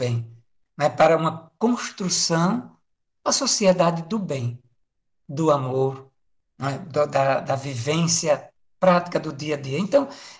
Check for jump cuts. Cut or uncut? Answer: cut